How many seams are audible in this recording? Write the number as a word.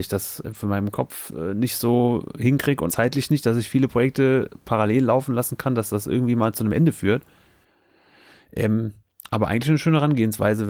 one